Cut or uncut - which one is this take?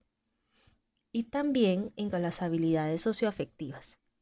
cut